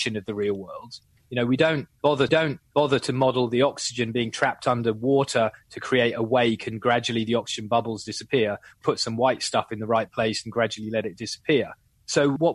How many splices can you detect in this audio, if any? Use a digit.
2